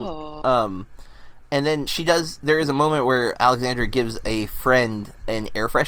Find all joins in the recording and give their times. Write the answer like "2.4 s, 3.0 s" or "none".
1.9 s, 3.3 s